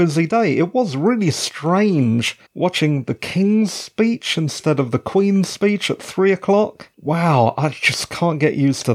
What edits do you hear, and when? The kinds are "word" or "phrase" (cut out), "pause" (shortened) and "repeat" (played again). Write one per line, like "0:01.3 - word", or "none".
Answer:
0:02.4 - pause
0:06.9 - pause